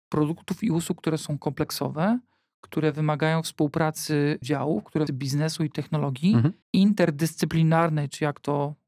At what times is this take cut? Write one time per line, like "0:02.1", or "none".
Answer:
0:04.4
0:05.1
0:06.6